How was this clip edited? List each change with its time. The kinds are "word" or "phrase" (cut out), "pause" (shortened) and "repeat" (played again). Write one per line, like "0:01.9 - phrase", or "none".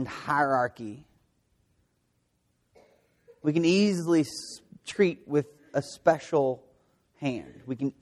none